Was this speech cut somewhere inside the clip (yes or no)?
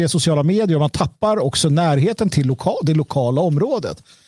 no